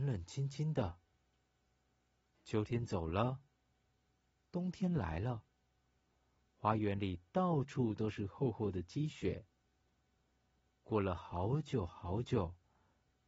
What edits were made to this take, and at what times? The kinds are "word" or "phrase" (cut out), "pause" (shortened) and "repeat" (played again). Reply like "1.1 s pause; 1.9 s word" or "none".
none